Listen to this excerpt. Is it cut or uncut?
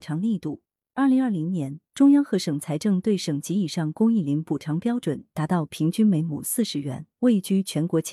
uncut